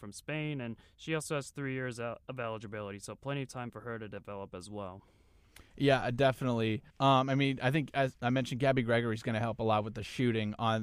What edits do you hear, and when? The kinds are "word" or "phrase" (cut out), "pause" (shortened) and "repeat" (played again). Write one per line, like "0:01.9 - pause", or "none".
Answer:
0:06.9 - pause